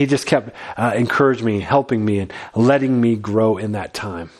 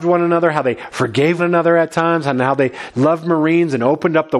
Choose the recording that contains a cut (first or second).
second